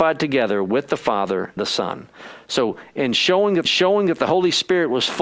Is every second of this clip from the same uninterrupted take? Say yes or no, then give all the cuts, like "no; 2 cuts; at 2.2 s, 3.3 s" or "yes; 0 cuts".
no; 2 cuts; at 1.6 s, 3.6 s